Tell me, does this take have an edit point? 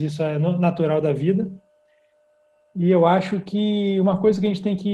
no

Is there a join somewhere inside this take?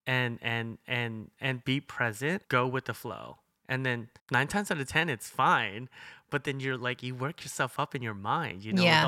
yes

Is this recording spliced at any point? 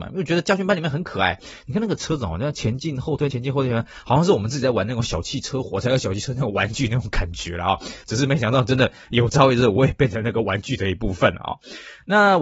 yes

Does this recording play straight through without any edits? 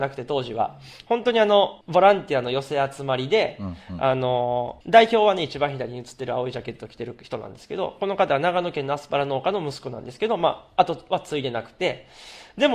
no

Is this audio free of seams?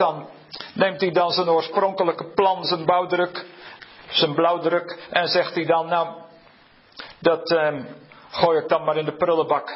yes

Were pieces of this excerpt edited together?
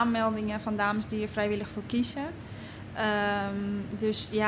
no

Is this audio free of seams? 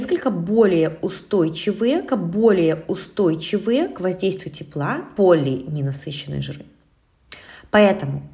no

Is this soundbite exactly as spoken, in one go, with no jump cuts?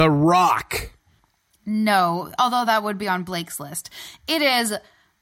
yes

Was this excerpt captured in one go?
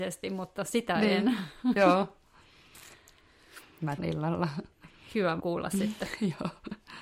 no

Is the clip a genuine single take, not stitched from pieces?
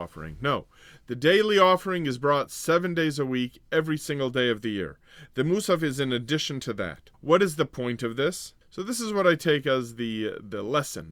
no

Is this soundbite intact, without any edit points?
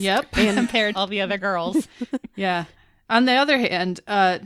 no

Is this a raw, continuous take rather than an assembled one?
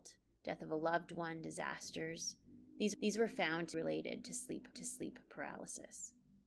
no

